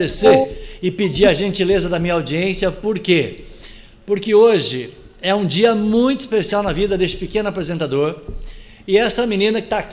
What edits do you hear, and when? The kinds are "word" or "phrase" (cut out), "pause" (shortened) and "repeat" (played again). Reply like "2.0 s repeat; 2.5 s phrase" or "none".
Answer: none